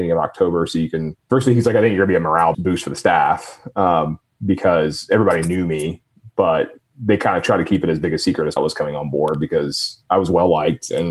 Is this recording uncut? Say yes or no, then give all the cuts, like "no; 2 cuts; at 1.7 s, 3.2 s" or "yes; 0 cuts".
no; 3 cuts; at 1.2 s, 2.5 s, 8.6 s